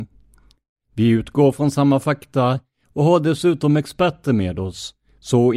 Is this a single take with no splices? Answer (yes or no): yes